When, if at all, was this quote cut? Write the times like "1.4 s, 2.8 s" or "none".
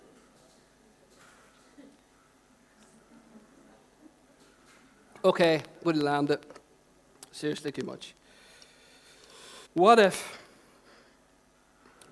5.8 s, 7.7 s, 9.7 s